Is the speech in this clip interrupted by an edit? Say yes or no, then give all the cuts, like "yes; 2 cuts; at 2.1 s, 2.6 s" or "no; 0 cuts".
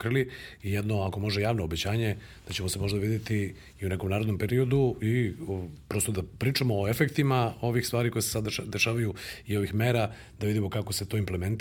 no; 0 cuts